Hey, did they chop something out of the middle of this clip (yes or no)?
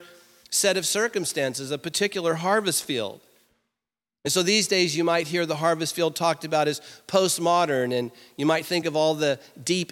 no